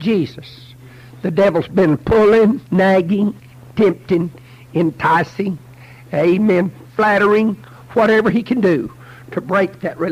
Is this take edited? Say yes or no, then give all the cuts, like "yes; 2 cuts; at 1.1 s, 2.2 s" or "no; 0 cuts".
yes; 1 cut; at 2.6 s